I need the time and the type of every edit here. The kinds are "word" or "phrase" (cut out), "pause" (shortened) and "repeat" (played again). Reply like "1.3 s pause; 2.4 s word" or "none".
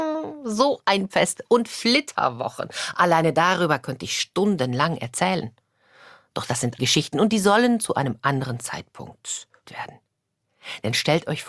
1.1 s word; 6.8 s word; 9.6 s word